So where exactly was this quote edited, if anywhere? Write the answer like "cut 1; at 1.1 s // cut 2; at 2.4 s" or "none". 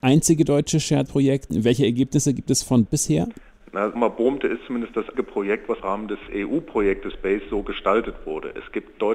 cut 1; at 1.1 s // cut 2; at 2.9 s // cut 3; at 4.0 s // cut 4; at 5.1 s // cut 5; at 5.8 s // cut 6; at 7.1 s